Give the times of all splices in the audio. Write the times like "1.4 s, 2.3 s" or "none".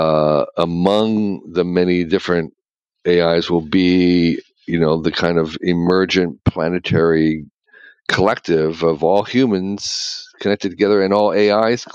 none